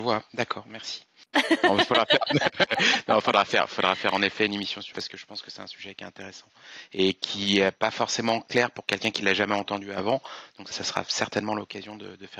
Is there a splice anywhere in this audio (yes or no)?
yes